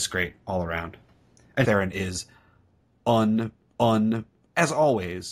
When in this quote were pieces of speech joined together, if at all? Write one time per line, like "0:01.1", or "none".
0:01.6
0:03.7